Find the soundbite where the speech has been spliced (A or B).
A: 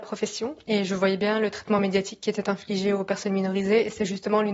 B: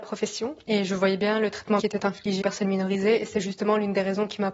B